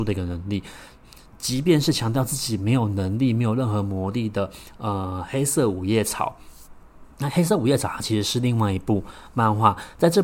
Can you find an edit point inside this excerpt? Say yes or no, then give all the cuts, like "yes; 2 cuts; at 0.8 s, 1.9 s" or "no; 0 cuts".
yes; 1 cut; at 7.1 s